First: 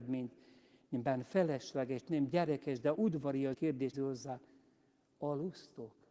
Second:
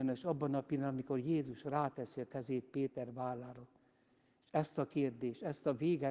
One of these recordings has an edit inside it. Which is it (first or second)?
first